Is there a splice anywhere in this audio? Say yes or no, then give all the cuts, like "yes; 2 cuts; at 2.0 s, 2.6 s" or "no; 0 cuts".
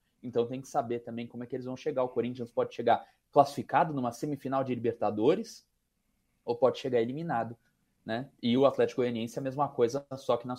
no; 0 cuts